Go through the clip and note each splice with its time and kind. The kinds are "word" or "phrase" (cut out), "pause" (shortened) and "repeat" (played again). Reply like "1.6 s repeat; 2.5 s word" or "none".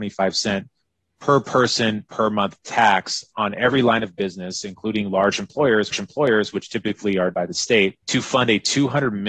5.9 s repeat; 7.3 s phrase; 8.0 s pause